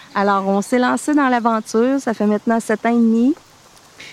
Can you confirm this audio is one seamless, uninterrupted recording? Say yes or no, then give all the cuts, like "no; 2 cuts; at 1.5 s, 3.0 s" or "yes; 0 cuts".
yes; 0 cuts